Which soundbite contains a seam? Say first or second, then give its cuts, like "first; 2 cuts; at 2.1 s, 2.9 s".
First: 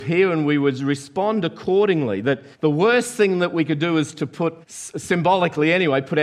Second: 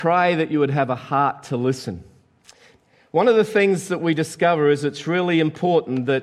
first; 2 cuts; at 2.5 s, 4.6 s